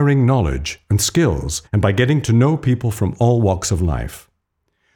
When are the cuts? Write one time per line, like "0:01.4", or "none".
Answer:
0:01.7